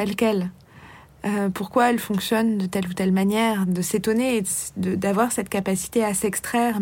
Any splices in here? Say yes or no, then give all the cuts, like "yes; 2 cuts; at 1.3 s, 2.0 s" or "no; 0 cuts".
no; 0 cuts